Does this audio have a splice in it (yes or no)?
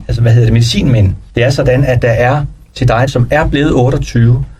yes